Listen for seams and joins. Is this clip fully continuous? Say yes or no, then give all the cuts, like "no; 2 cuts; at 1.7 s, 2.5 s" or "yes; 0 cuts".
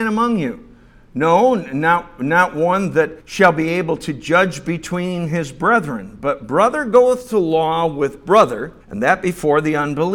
no; 2 cuts; at 3.2 s, 8.8 s